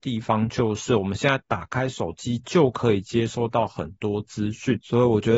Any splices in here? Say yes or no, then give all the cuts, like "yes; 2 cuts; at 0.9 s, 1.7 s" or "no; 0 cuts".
no; 0 cuts